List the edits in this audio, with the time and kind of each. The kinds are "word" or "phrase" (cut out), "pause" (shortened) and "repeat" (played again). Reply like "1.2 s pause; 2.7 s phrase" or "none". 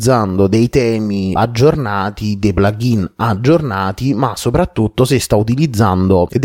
none